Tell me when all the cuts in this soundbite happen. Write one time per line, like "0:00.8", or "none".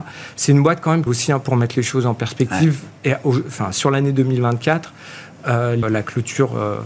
0:01.1
0:05.8